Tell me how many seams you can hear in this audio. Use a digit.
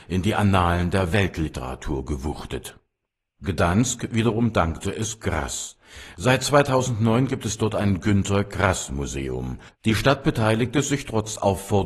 1